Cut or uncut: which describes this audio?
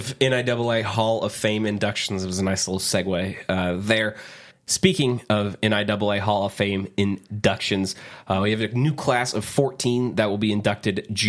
cut